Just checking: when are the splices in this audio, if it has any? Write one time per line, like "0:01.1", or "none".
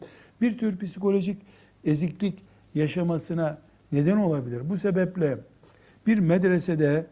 none